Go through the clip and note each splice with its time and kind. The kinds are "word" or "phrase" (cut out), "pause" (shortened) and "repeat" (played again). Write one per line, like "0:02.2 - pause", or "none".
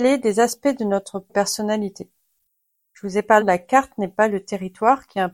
0:01.3 - word
0:03.4 - word